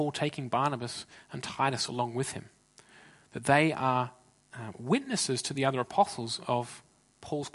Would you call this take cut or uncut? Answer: uncut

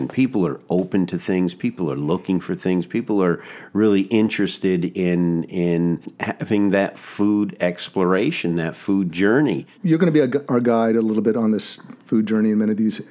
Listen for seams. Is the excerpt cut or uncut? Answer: cut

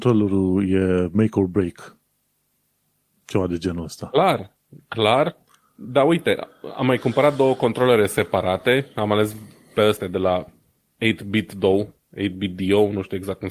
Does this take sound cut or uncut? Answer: uncut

